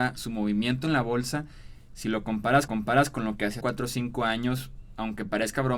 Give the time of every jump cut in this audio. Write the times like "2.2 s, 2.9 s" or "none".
2.7 s, 3.6 s